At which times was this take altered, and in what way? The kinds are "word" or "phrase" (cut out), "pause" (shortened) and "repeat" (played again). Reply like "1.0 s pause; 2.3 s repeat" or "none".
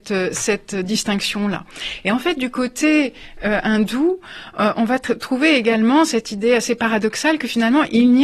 none